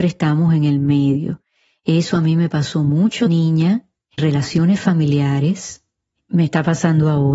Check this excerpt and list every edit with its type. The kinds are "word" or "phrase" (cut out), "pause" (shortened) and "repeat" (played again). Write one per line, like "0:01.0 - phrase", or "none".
0:03.3 - word
0:04.2 - word